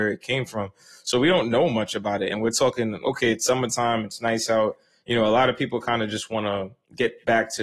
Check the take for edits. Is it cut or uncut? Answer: uncut